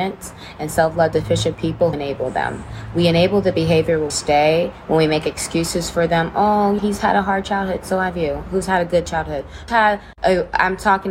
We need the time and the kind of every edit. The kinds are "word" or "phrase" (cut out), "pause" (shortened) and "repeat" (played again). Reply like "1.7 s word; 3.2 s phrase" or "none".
1.9 s word; 4.1 s word; 6.8 s word; 9.7 s word